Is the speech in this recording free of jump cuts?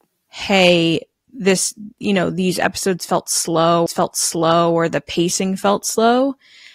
no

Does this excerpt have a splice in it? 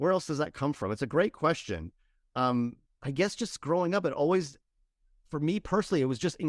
yes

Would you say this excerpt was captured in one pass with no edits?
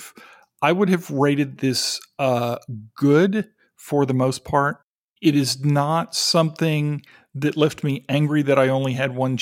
yes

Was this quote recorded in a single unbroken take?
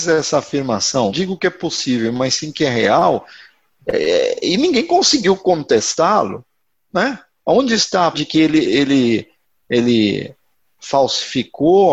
no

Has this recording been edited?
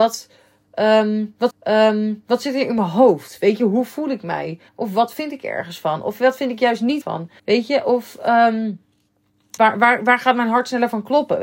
yes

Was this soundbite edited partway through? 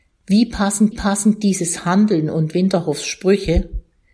yes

